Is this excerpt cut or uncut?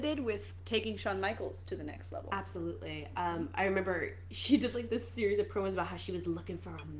uncut